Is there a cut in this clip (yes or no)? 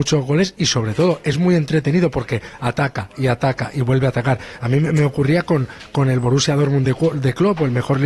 no